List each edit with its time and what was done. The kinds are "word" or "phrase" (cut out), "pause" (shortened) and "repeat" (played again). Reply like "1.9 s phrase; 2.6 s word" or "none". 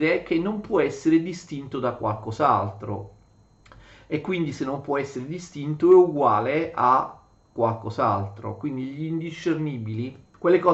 none